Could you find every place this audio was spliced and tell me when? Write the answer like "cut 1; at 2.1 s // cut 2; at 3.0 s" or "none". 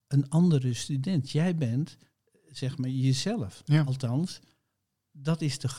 none